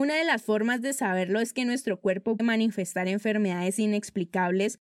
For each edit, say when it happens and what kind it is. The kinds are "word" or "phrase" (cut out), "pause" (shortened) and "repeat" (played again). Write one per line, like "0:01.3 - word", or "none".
0:02.4 - word